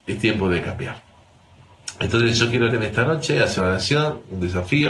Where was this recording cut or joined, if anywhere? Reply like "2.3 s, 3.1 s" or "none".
2.7 s, 3.6 s